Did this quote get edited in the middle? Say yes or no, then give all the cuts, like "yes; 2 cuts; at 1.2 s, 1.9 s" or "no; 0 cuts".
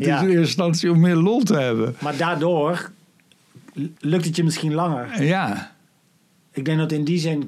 yes; 1 cut; at 4.0 s